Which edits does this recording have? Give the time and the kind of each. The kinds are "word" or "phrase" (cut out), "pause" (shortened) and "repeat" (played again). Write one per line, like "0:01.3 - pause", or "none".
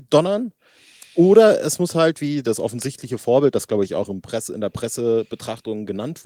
none